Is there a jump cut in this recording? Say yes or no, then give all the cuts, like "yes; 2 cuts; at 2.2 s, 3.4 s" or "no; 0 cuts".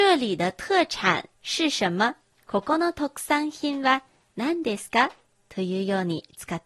yes; 2 cuts; at 1.4 s, 2.3 s